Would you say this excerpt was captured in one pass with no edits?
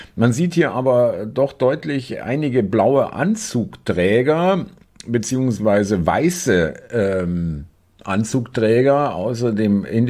yes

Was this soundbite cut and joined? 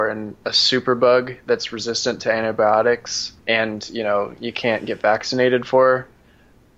yes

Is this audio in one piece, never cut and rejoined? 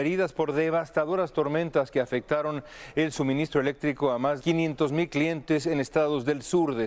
no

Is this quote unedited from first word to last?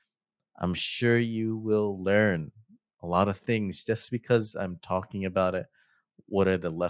yes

